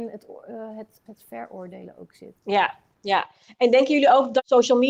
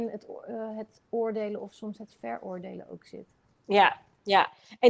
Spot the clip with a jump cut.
first; 2 cuts; at 1.1 s, 2.4 s

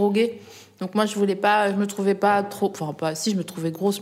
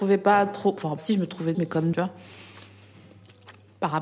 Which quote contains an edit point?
second; 3 cuts; at 1.0 s, 1.5 s, 1.9 s

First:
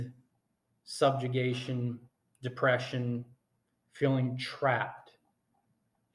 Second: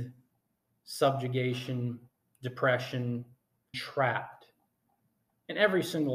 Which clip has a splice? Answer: second; 1 cut; at 3.7 s

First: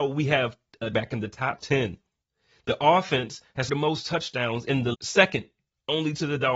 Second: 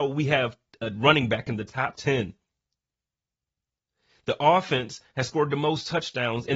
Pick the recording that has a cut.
first; 4 cuts; at 0.9 s, 2.2 s, 3.7 s, 4.9 s

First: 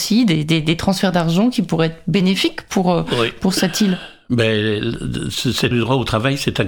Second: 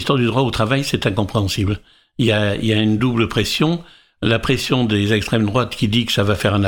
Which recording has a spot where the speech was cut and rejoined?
first; 1 cut; at 5.7 s

